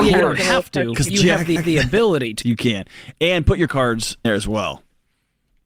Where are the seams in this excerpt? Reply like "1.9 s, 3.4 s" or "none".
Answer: 1.1 s, 1.6 s, 2.4 s, 3.7 s, 4.2 s